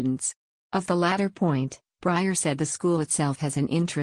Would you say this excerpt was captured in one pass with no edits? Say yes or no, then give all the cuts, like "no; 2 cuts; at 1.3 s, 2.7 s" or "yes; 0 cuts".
yes; 0 cuts